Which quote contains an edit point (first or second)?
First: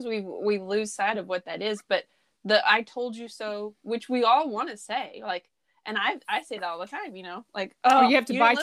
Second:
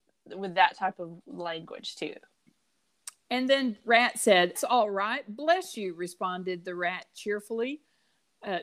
second